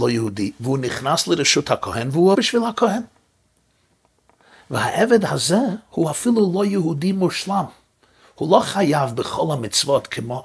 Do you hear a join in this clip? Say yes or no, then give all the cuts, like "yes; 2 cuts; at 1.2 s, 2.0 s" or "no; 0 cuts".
yes; 1 cut; at 2.3 s